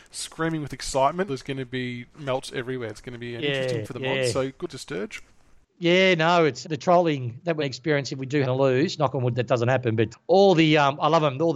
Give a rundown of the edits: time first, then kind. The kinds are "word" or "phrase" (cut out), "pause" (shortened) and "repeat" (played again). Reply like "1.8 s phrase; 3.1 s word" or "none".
1.3 s word; 2.1 s word; 3.8 s word; 4.7 s word; 6.6 s word; 7.6 s word; 8.4 s word; 10.1 s word